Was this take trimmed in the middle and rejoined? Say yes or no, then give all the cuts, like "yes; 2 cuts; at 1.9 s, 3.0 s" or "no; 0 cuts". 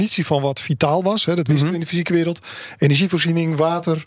no; 0 cuts